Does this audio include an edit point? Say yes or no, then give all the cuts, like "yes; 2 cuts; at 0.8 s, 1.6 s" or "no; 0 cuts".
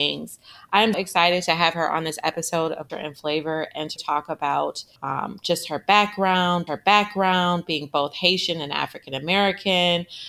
yes; 5 cuts; at 0.9 s, 2.9 s, 4.0 s, 5.0 s, 6.7 s